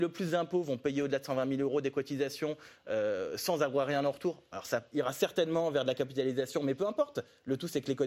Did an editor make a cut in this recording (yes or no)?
no